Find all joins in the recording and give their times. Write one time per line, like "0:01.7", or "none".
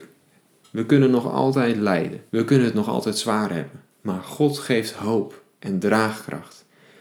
0:02.3
0:03.9